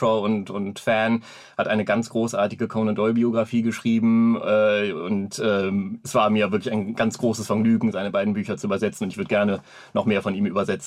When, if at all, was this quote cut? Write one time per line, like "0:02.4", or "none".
none